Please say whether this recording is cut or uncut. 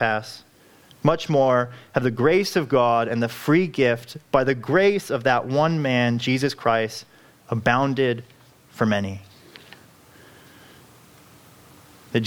uncut